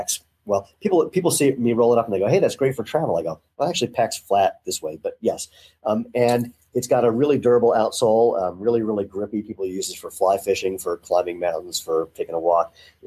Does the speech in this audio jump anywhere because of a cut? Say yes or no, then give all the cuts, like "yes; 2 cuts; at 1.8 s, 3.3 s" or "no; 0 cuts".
no; 0 cuts